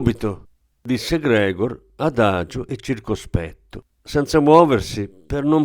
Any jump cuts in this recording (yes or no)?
no